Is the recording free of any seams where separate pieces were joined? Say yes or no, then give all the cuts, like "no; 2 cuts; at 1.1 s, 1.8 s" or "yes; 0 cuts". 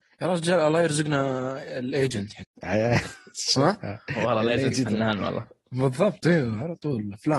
yes; 0 cuts